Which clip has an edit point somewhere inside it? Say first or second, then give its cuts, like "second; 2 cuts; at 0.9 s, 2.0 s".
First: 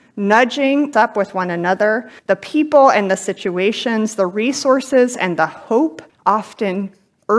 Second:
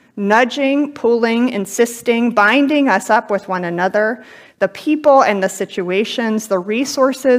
first; 3 cuts; at 0.9 s, 2.2 s, 6.1 s